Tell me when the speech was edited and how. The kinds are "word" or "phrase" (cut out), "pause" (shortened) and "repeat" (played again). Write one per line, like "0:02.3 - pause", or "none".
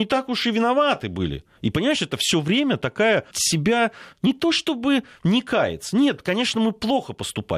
0:01.5 - pause
0:03.3 - word
0:04.1 - word

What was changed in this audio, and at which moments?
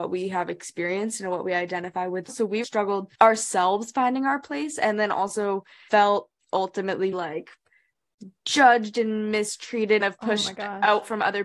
0:02.3 - word
0:02.6 - word
0:03.1 - pause
0:05.9 - word
0:07.1 - word
0:10.0 - phrase

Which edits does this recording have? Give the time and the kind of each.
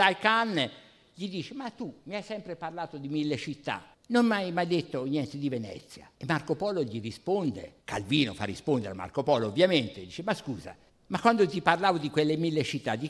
0:03.9 - pause
0:06.1 - pause
0:07.8 - pause
0:10.9 - pause

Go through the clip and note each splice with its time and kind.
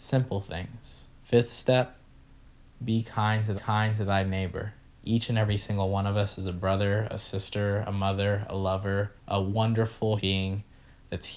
0:01.1 - pause
0:03.6 - repeat
0:09.2 - pause
0:10.2 - word

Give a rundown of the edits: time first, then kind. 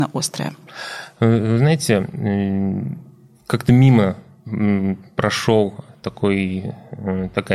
none

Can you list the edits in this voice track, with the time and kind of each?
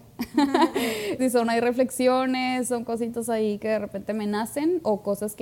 0:01.2 - word

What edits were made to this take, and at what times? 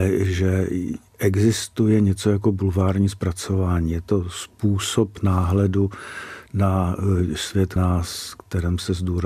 0:07.8 - word

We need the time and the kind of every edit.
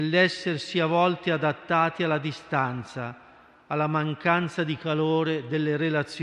none

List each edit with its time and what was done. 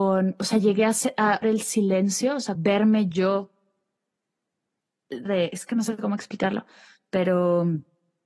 0:01.4 - word
0:02.6 - word
0:05.3 - word

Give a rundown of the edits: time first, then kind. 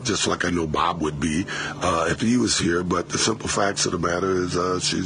none

